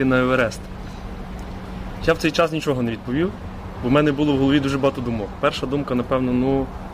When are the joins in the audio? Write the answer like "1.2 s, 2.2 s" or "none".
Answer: none

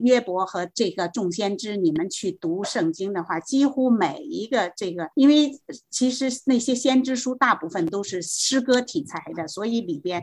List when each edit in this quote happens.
5.1 s

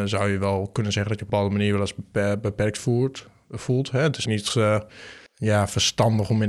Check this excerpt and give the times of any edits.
1.3 s, 4.3 s, 5.3 s

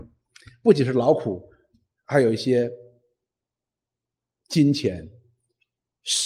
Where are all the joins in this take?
none

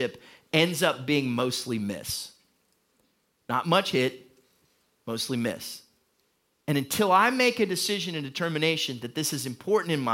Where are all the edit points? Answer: none

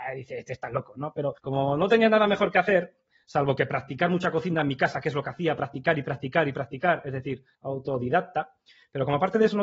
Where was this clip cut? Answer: 1.4 s, 7.5 s

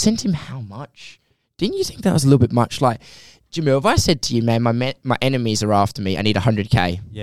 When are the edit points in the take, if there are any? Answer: none

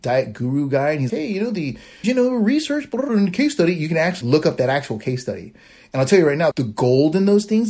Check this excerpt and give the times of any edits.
1.1 s, 2.0 s, 3.1 s, 4.2 s, 6.5 s

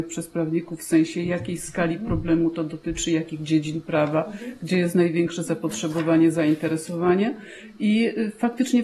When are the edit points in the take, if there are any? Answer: none

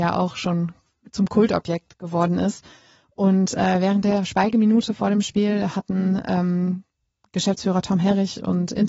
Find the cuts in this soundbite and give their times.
none

